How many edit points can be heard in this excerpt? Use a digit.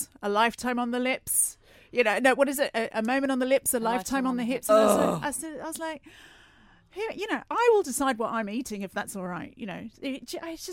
0